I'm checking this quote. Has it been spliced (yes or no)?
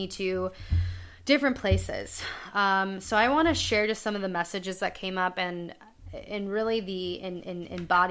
no